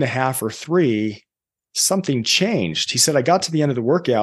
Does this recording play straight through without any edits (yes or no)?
yes